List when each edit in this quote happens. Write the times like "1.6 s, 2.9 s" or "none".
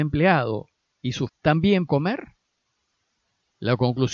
1.3 s, 1.9 s